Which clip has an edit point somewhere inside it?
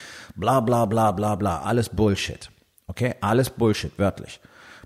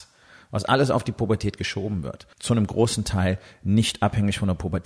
second; 1 cut; at 2.3 s

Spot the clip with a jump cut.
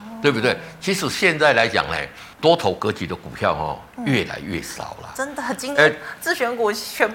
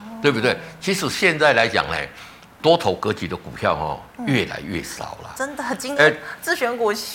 first; 1 cut; at 2.3 s

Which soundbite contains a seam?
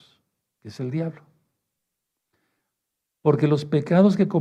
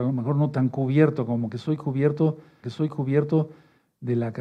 second; 1 cut; at 2.6 s

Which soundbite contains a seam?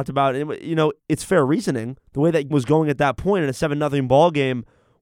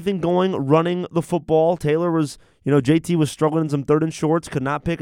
first; 3 cuts; at 1.0 s, 2.0 s, 2.5 s

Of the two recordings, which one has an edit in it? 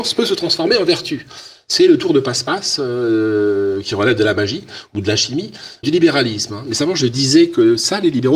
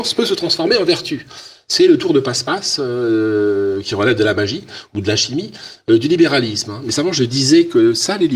first; 1 cut; at 5.8 s

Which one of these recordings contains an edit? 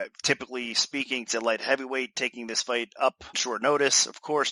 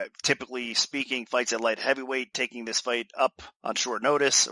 first; 2 cuts; at 1.3 s, 3.3 s

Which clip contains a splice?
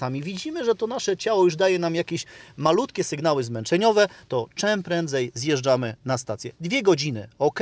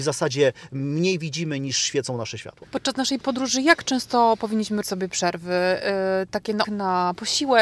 second; 2 cuts; at 4.8 s, 6.6 s

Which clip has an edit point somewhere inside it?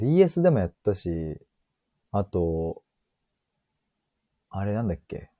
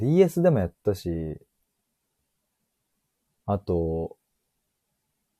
first; 1 cut; at 1.6 s

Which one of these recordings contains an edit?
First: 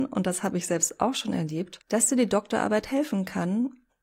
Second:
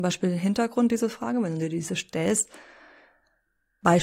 first; 1 cut; at 1.8 s

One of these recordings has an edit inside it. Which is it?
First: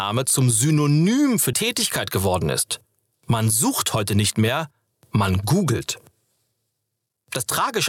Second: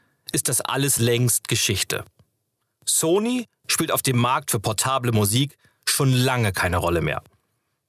first; 1 cut; at 1.5 s

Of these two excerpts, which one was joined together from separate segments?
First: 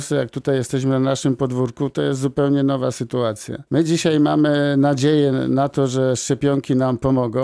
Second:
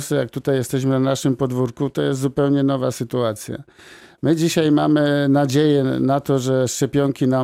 first; 1 cut; at 3.7 s

